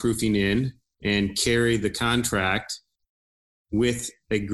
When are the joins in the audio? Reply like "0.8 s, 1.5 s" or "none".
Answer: none